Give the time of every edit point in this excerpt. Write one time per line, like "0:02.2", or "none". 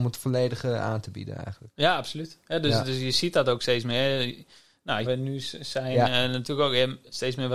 0:05.1